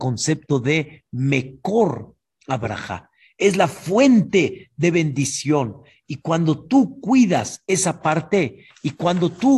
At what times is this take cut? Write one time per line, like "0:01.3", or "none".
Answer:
none